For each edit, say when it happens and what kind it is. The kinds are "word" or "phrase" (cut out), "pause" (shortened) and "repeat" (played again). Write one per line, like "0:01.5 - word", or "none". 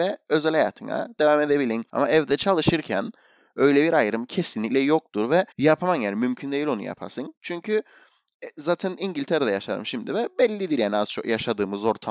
0:05.5 - pause